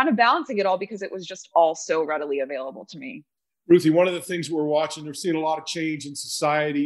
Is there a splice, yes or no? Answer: yes